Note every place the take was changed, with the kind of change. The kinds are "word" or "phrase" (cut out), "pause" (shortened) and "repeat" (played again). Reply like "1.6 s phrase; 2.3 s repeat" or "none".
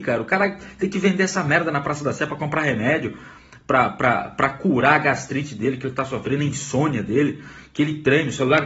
none